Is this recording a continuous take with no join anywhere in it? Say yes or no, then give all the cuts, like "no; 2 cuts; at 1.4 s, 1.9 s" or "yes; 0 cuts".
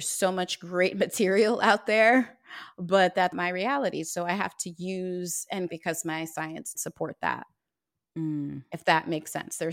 no; 3 cuts; at 3.3 s, 5.7 s, 6.8 s